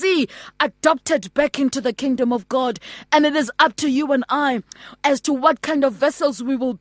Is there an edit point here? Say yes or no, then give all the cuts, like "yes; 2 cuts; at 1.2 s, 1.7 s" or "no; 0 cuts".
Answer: no; 0 cuts